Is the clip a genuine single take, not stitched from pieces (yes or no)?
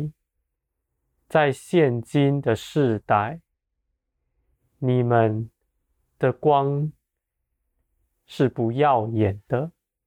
yes